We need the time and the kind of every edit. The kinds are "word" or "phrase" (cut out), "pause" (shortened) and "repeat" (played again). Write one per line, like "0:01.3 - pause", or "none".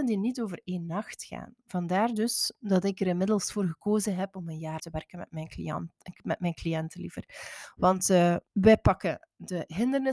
0:04.8 - phrase
0:08.5 - pause